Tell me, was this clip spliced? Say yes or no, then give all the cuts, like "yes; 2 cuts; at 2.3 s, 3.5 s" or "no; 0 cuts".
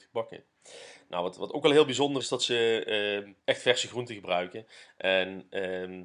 yes; 2 cuts; at 2.2 s, 3.4 s